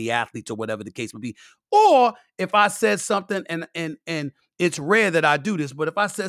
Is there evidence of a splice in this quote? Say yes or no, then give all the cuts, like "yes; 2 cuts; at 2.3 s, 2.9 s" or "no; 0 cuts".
no; 0 cuts